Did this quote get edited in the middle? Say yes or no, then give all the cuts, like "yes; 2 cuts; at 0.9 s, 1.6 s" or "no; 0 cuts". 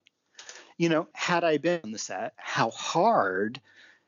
yes; 3 cuts; at 1.1 s, 1.8 s, 2.3 s